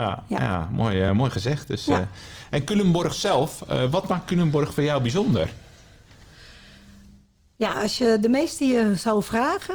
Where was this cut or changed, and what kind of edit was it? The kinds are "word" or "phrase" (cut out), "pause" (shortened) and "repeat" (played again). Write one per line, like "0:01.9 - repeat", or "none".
none